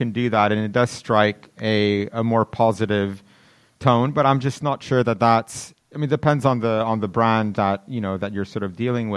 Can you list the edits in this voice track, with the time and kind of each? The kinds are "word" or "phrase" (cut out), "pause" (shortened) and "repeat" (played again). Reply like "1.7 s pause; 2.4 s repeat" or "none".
none

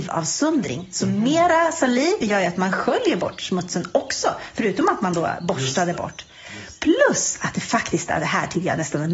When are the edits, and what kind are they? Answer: none

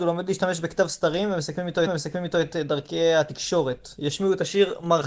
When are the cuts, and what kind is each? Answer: 1.9 s repeat

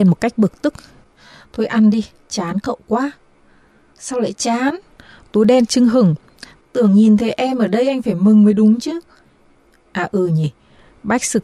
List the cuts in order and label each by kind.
none

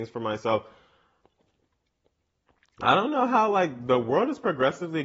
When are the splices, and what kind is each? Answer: none

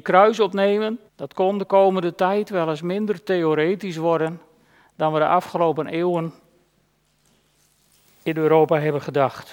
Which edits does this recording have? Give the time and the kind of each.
1.1 s pause

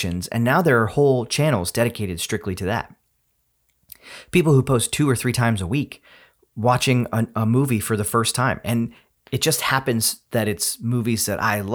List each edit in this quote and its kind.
none

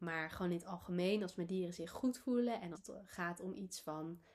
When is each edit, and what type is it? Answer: 2.7 s word

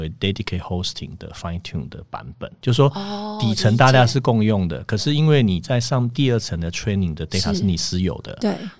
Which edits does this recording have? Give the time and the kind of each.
none

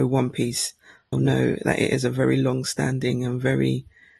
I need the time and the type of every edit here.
1.1 s word

